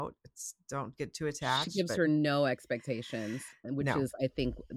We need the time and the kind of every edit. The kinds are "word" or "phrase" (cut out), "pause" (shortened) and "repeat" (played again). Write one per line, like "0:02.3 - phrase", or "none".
none